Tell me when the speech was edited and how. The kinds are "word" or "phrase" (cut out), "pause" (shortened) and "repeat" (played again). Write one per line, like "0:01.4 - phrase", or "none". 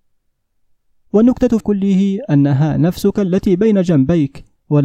0:01.6 - word